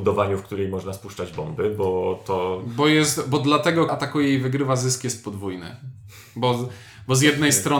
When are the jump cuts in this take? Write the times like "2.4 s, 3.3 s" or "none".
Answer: 3.9 s